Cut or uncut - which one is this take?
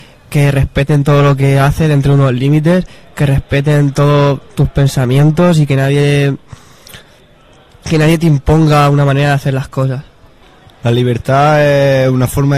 uncut